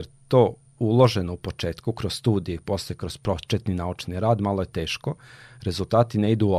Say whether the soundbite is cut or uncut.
uncut